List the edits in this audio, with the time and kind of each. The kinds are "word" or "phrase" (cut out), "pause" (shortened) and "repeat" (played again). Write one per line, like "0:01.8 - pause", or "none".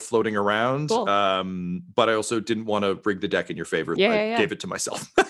0:04.0 - word